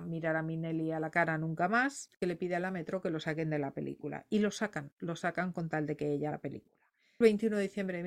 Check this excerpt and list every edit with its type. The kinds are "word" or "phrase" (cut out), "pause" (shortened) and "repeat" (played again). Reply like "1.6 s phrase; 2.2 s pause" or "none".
6.3 s word